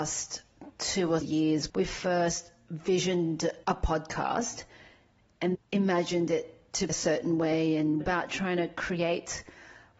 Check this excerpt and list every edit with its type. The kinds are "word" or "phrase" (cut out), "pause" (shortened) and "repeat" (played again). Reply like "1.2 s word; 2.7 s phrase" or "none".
1.2 s word; 1.7 s word; 3.6 s pause; 5.5 s word; 6.9 s word; 8.0 s word